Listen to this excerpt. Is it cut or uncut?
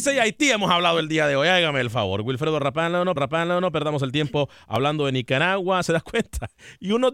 cut